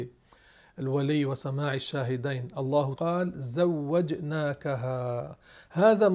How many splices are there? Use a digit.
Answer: 1